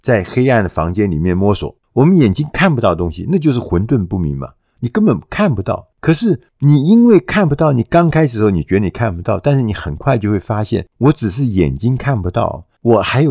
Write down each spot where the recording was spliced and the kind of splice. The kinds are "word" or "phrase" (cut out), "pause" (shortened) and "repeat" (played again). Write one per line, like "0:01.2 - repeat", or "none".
0:06.5 - pause

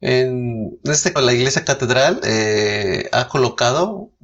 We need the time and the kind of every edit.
0:01.2 - word

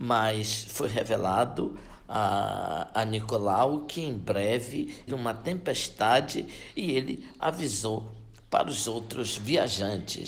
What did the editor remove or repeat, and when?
0:05.1 - phrase

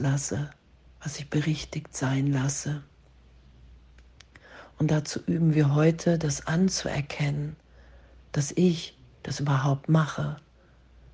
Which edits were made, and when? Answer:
none

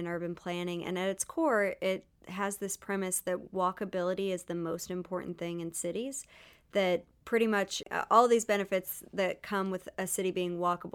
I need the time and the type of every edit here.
none

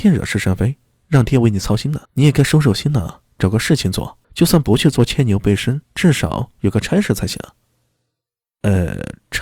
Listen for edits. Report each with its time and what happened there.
0:02.0 - pause
0:04.2 - pause
0:05.8 - pause

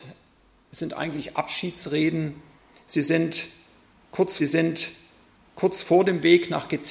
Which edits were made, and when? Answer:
0:04.4 - repeat

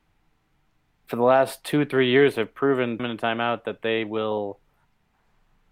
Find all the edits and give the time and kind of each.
0:03.0 - word

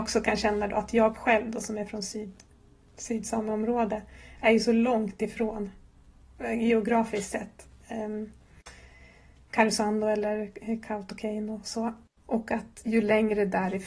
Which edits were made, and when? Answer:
none

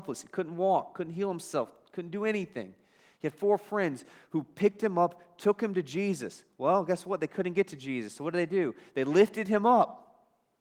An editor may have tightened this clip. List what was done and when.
none

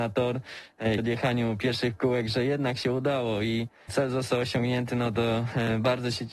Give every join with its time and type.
0:01.0 - word
0:03.9 - word

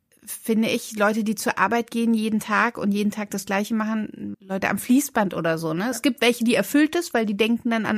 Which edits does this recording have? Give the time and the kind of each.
0:04.3 - word

